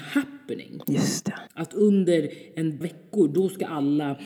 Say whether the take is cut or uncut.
cut